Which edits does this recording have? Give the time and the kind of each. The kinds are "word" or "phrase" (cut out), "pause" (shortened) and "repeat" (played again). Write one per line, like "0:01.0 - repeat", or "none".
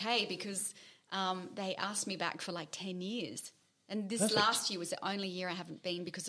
none

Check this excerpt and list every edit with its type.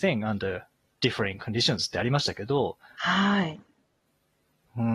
none

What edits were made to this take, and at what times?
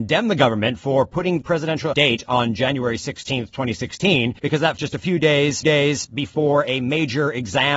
0:01.4 - word
0:01.9 - word
0:04.4 - pause
0:04.8 - word
0:05.6 - repeat

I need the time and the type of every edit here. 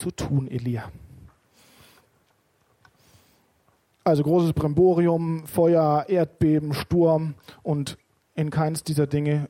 none

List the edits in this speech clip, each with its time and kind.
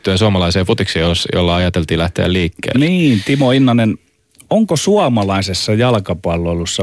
none

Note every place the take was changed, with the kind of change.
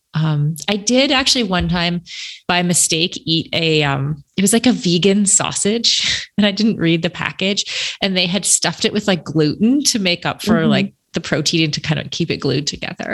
0:02.4 - pause

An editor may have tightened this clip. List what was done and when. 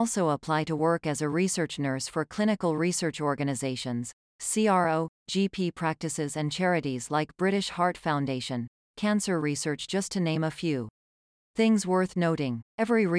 none

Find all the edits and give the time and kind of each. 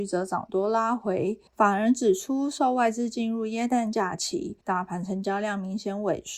0:01.5 - pause
0:04.6 - pause

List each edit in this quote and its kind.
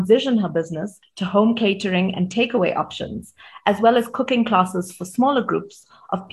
none

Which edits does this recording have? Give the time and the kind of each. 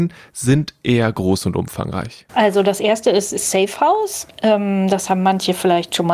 none

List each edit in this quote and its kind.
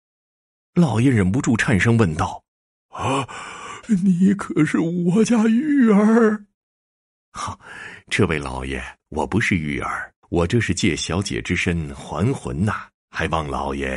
0:02.5 - pause
0:06.5 - pause
0:09.0 - pause
0:10.2 - pause
0:13.0 - pause

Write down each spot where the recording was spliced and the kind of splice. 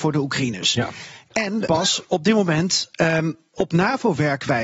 0:01.7 - word
0:03.5 - phrase

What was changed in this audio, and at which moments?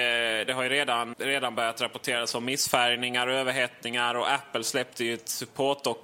0:01.1 - word

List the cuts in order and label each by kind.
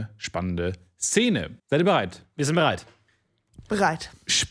0:01.6 - pause

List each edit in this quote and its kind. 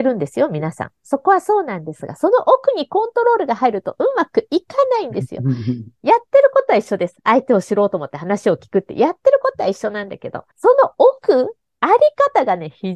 0:10.5 - pause

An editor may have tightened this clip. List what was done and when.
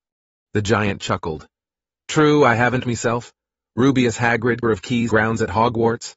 0:02.8 - word
0:04.6 - word
0:05.1 - word

